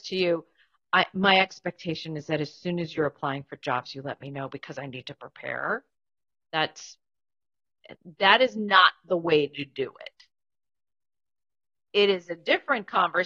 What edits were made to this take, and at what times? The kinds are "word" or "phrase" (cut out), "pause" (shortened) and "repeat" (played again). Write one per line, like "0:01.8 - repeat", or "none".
none